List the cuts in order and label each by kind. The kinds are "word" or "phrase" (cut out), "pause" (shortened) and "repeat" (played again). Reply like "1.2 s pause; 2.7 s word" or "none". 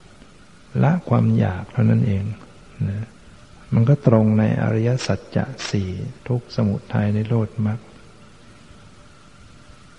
3.4 s pause; 6.2 s pause